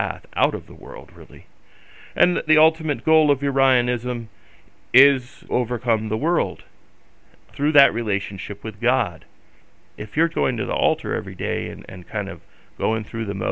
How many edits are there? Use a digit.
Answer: 4